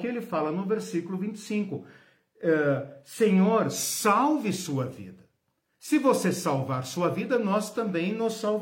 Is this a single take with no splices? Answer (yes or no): yes